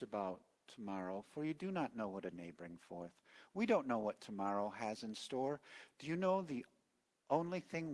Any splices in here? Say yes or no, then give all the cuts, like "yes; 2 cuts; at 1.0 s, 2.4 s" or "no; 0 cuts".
yes; 1 cut; at 2.3 s